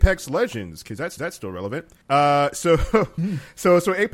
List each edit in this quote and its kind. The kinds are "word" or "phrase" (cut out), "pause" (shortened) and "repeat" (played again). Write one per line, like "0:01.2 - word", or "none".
0:01.2 - repeat
0:02.0 - pause